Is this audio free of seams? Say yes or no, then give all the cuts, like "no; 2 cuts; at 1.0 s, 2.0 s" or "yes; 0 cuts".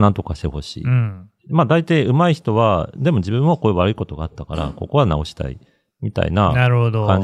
yes; 0 cuts